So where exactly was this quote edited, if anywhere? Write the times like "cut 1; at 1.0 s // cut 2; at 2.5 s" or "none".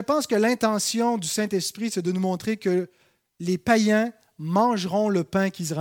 none